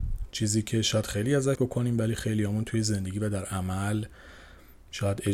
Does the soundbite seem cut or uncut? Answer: cut